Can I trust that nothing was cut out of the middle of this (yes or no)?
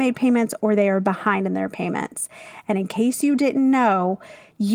yes